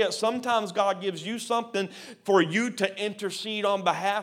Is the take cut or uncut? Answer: uncut